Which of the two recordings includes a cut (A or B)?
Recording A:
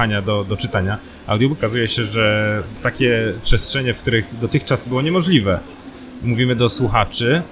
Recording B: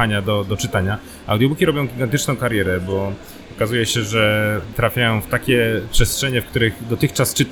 A